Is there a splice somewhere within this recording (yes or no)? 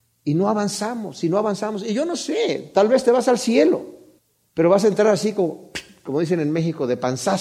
yes